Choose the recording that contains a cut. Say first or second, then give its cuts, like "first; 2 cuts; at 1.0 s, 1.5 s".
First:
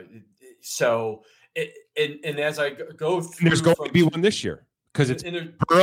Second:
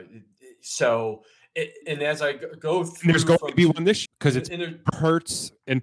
second; 3 cuts; at 1.8 s, 4.1 s, 4.9 s